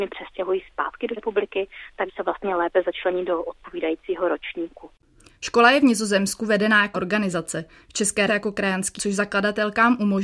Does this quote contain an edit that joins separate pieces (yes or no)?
yes